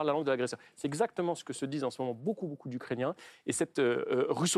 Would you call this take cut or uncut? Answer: uncut